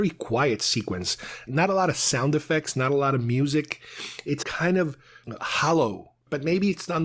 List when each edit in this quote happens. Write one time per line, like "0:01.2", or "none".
0:04.4